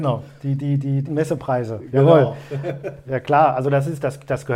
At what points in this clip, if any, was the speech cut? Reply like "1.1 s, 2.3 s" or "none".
1.1 s, 3.0 s